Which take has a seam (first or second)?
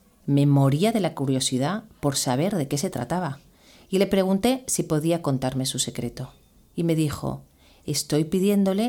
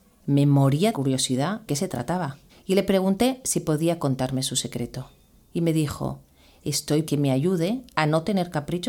second